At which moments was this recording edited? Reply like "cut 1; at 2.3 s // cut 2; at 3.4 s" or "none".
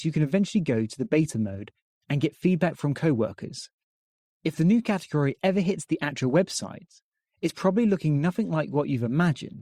none